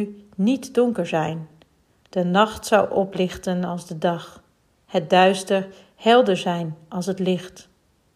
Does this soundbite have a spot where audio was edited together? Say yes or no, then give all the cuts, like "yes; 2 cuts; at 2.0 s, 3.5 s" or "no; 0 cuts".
no; 0 cuts